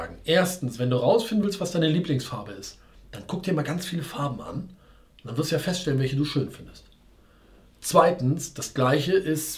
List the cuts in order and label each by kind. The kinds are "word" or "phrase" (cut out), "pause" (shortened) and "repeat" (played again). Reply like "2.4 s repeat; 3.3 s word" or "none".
none